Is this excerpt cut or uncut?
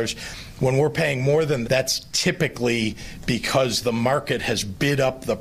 cut